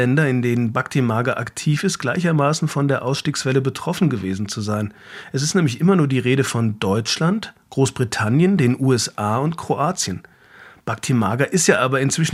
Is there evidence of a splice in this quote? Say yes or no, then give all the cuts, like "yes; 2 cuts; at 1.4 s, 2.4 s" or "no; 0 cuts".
no; 0 cuts